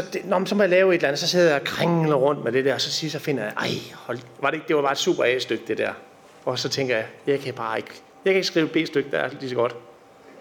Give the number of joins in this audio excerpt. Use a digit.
0